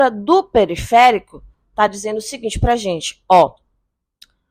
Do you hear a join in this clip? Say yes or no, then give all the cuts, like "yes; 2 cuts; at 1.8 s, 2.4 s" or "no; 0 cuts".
no; 0 cuts